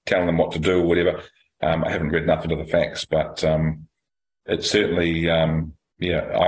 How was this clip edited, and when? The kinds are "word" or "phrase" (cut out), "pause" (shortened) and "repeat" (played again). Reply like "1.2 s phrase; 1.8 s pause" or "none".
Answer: none